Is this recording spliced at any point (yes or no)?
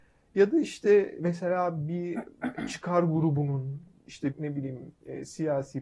yes